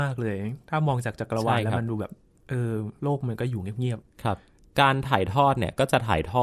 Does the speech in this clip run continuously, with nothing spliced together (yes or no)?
yes